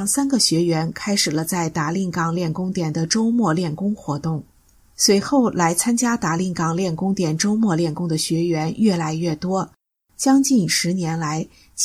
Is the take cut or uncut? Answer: uncut